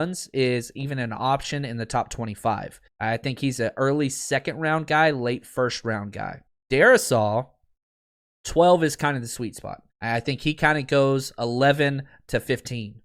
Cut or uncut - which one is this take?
cut